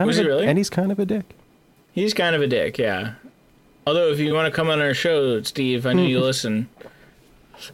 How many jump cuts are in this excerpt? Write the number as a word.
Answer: one